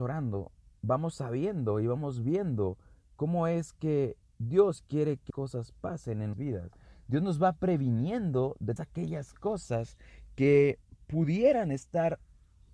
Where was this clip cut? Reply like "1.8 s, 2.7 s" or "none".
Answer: 5.3 s, 6.3 s, 8.8 s

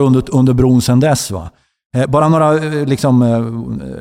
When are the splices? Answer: none

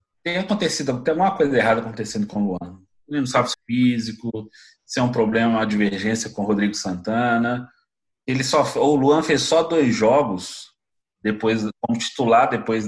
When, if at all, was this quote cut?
3.5 s

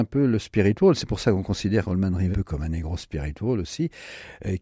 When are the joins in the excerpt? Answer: 2.3 s

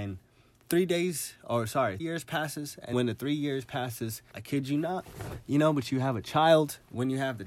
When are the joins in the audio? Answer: 2.0 s, 2.9 s, 4.3 s

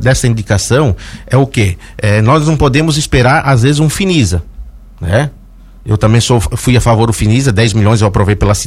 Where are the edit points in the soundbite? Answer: none

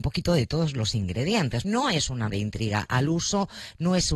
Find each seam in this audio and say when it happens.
1.6 s, 2.3 s

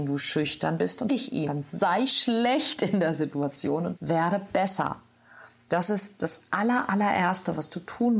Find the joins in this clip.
1.1 s, 1.5 s, 4.0 s

